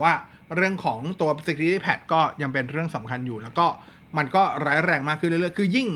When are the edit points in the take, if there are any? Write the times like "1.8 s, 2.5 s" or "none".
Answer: none